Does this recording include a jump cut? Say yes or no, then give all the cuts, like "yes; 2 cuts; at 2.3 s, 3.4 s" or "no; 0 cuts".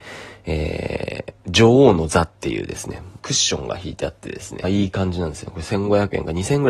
yes; 3 cuts; at 1.4 s, 3.2 s, 4.6 s